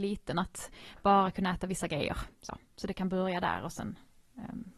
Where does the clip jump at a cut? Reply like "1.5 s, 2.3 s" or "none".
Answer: 2.3 s